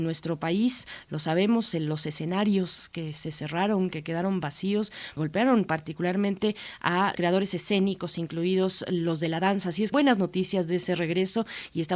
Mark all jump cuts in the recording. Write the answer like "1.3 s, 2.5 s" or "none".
5.2 s, 7.1 s, 9.9 s

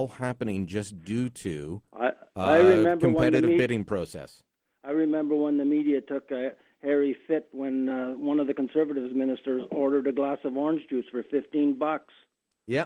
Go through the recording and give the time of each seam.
none

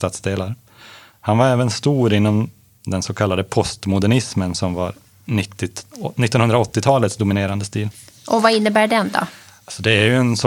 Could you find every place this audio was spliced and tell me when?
none

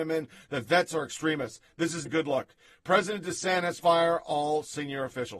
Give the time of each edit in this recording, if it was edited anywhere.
2.1 s, 3.8 s

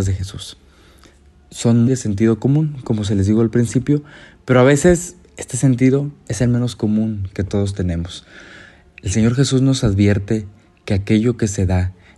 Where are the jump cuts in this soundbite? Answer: 1.9 s

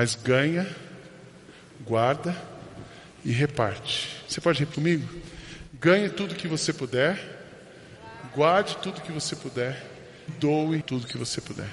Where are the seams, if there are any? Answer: 4.7 s, 10.3 s, 10.8 s

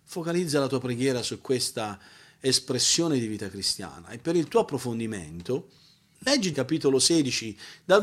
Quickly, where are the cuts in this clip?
6.5 s

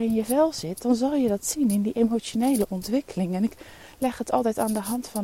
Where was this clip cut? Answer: none

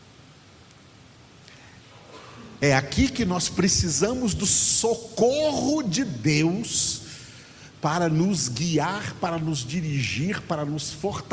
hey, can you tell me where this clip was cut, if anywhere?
none

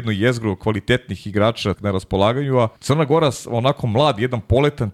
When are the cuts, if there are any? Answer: 1.7 s, 2.8 s

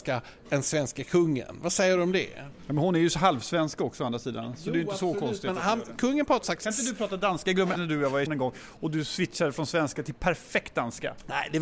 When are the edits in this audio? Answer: 6.4 s, 7.7 s, 8.3 s

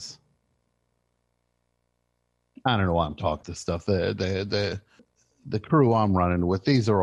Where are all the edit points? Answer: 3.4 s, 5.0 s

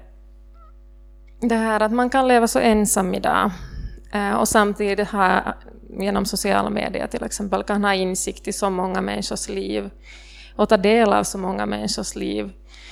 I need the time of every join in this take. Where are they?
none

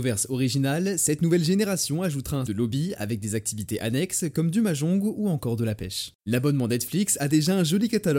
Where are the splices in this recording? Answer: 2.5 s, 6.2 s

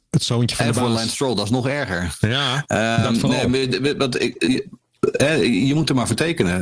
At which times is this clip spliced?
none

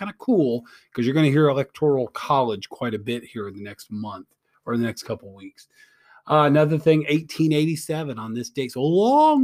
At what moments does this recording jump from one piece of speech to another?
none

